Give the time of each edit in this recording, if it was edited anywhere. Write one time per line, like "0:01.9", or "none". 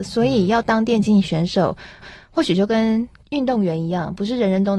0:02.0